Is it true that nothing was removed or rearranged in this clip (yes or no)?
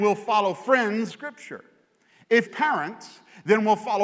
no